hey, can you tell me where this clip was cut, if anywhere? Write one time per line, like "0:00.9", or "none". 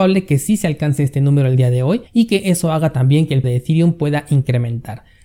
0:02.1
0:03.4